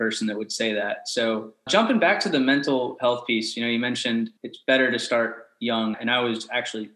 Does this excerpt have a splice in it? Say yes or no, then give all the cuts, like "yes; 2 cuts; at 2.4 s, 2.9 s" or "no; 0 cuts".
yes; 3 cuts; at 1.7 s, 4.4 s, 5.9 s